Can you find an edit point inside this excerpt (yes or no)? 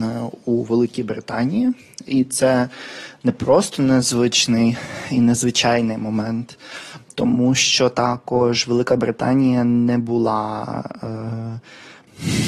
no